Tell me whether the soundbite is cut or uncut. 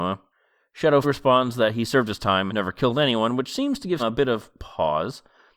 cut